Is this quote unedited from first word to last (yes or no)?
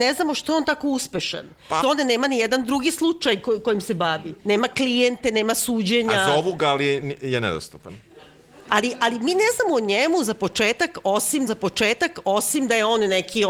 no